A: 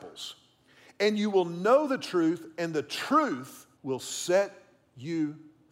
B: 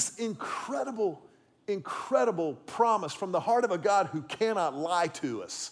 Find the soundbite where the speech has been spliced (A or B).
A